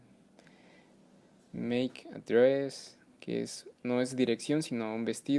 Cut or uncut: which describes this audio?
cut